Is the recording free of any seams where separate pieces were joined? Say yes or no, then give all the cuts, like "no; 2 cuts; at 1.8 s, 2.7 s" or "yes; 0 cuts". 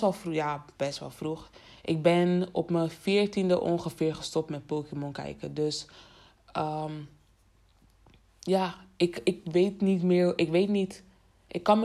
yes; 0 cuts